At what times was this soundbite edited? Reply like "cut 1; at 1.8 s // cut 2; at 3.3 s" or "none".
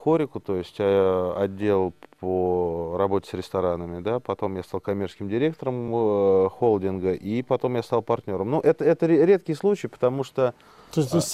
none